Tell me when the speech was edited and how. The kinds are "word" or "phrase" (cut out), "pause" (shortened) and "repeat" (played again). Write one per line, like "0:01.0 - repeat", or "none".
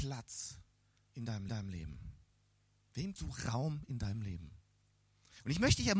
0:01.5 - repeat
0:03.2 - word